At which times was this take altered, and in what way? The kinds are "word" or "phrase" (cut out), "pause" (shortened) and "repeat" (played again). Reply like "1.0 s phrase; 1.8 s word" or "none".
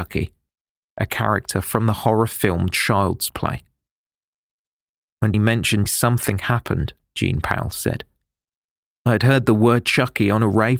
5.3 s word; 5.9 s word